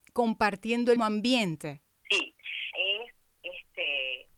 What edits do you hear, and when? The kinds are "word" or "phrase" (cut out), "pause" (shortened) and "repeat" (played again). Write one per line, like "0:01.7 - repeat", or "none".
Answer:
0:01.0 - word
0:02.7 - word